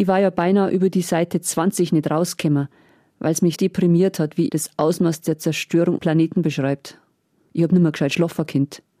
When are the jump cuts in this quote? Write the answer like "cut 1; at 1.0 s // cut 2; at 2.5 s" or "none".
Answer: cut 1; at 3.5 s // cut 2; at 4.5 s // cut 3; at 6.0 s